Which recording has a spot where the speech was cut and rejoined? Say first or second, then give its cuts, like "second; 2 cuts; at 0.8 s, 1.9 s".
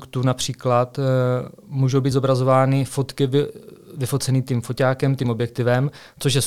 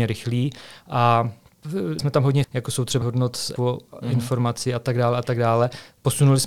second; 4 cuts; at 2.0 s, 2.4 s, 3.0 s, 3.6 s